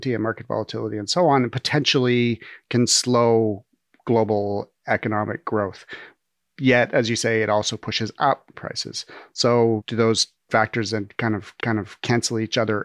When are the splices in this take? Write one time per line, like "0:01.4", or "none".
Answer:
0:08.5
0:11.6